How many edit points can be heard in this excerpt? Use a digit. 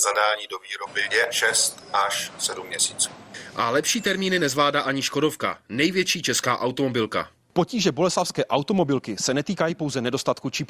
0